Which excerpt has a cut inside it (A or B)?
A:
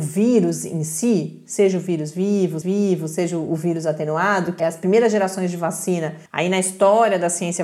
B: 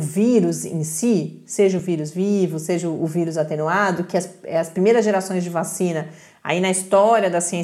A